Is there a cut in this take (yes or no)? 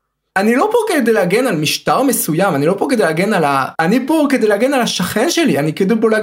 yes